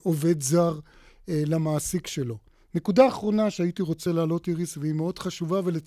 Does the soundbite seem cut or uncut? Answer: uncut